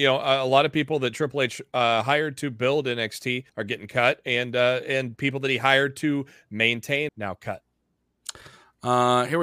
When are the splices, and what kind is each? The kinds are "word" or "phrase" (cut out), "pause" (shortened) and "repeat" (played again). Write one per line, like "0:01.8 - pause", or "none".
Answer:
0:03.5 - pause
0:07.1 - phrase